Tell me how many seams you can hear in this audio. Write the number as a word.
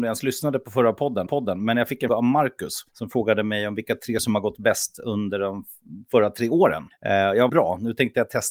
six